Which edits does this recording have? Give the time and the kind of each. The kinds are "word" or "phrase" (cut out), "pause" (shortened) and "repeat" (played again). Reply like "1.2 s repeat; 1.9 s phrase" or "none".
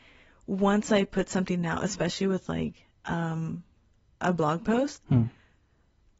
none